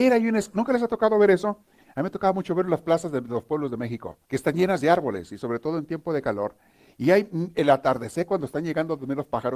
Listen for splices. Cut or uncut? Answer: cut